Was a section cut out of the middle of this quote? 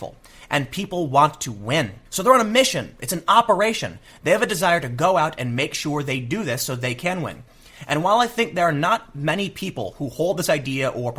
yes; 1 cut; at 2.1 s

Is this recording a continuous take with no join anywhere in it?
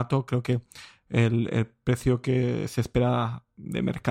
yes; 0 cuts

